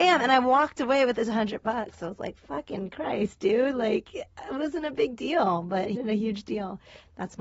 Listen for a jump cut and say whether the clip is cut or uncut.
cut